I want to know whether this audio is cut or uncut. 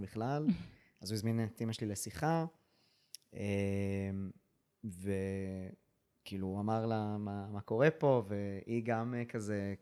uncut